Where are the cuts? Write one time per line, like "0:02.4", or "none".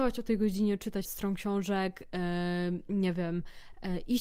0:01.0